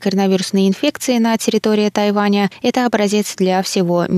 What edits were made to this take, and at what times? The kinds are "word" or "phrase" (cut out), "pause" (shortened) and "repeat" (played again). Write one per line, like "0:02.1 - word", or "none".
none